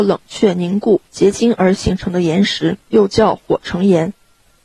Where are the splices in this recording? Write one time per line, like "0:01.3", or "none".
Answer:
0:01.1
0:02.8